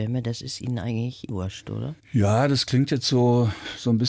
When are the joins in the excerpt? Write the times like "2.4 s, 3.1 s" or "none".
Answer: 1.3 s